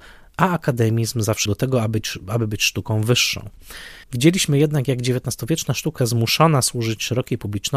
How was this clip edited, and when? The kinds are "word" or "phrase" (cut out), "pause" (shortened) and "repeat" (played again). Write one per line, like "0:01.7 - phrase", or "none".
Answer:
0:01.5 - word
0:04.0 - pause
0:06.0 - word